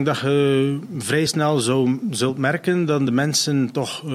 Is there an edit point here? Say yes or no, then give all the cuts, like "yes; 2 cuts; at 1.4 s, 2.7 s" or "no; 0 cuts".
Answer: no; 0 cuts